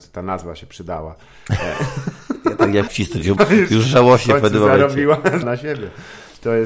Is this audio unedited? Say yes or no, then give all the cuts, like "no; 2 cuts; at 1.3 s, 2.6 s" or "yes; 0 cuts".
no; 3 cuts; at 2.9 s, 3.4 s, 5.4 s